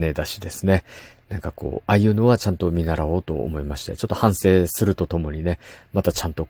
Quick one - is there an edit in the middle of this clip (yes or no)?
no